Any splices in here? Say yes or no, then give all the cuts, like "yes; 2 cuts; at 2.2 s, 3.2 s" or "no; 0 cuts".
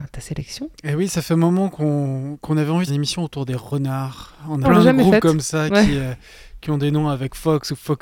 yes; 2 cuts; at 2.9 s, 4.6 s